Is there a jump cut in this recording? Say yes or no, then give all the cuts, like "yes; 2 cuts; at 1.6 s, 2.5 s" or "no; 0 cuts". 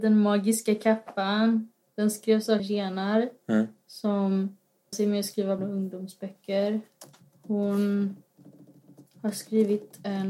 yes; 3 cuts; at 2.6 s, 4.9 s, 5.6 s